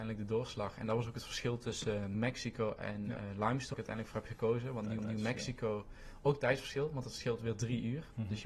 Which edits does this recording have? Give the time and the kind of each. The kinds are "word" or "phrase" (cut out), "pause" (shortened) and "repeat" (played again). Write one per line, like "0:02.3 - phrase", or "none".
0:02.1 - word
0:03.7 - word
0:05.0 - repeat

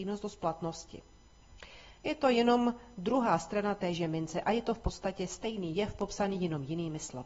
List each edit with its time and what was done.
none

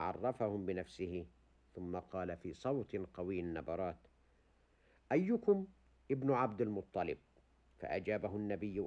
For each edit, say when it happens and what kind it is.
none

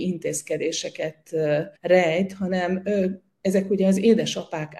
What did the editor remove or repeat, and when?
0:01.8 - pause

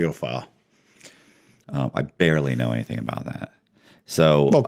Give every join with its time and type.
none

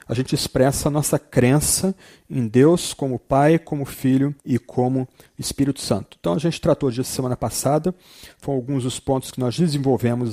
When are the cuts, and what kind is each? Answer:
0:04.4 - pause
0:08.4 - word

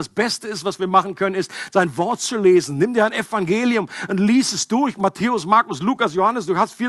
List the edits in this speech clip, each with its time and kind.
none

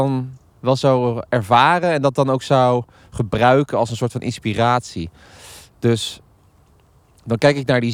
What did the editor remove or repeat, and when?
none

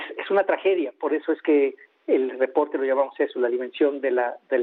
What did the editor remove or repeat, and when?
none

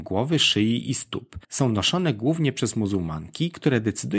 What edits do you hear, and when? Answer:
0:01.4 - pause

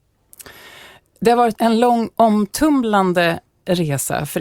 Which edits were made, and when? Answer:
0:01.6 - word
0:02.1 - word

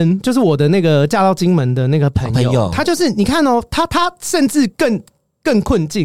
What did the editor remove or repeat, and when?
none

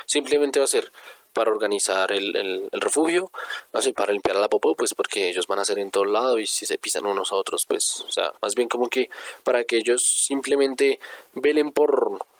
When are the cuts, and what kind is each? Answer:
0:08.4 - pause

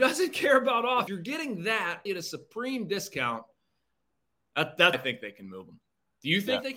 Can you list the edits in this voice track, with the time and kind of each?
0:01.1 - word
0:02.1 - word
0:04.9 - word

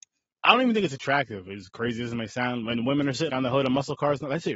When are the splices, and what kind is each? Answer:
0:03.3 - word

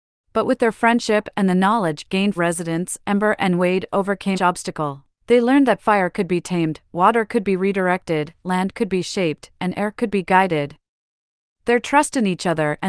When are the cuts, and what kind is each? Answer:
0:02.4 - phrase
0:04.3 - word
0:05.1 - pause

